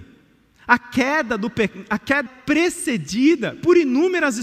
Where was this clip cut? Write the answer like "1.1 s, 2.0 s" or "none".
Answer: 2.3 s